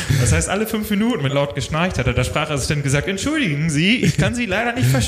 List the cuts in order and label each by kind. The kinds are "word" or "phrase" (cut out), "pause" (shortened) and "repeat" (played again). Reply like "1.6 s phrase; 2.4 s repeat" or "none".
1.3 s word